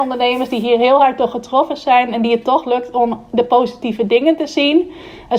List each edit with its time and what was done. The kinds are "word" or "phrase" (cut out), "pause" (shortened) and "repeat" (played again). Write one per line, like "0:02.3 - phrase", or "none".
none